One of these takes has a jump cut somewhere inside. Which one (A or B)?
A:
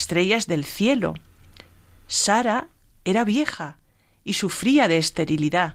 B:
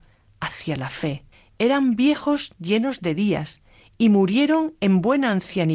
B